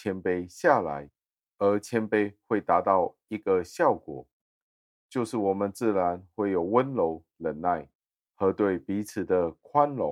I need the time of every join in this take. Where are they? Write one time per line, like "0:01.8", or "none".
none